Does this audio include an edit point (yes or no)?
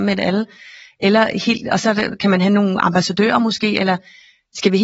no